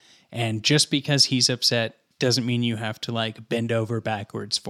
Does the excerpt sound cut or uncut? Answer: uncut